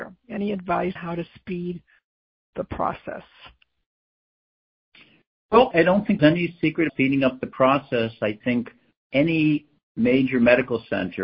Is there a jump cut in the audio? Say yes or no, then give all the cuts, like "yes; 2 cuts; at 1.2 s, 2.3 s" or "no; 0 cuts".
yes; 7 cuts; at 1.0 s, 2.5 s, 5.7 s, 6.2 s, 6.9 s, 8.4 s, 8.9 s